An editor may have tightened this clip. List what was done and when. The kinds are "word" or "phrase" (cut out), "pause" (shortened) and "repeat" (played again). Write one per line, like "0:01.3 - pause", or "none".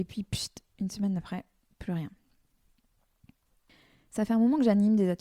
none